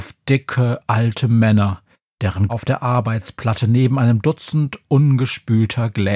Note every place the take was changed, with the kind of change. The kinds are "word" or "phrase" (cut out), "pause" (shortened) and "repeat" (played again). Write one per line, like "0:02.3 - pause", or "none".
0:02.5 - word